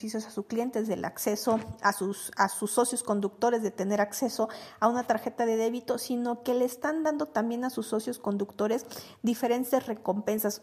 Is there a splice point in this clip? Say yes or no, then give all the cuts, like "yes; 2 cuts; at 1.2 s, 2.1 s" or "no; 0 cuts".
no; 0 cuts